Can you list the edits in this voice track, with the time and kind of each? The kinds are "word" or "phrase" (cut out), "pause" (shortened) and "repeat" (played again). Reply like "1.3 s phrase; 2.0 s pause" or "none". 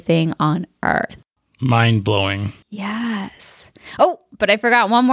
2.6 s pause